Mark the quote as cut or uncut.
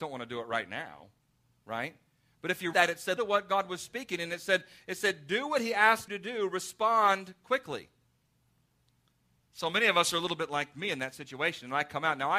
cut